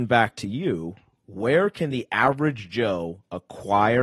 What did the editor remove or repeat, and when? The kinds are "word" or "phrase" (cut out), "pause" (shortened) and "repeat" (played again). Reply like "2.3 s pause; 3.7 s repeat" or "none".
none